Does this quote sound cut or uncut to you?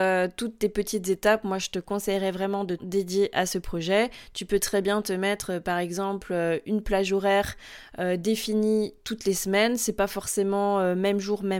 cut